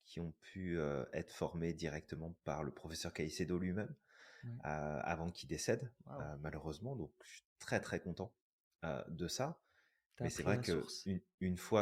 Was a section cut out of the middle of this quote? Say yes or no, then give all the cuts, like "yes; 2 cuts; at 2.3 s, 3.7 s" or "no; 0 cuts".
no; 0 cuts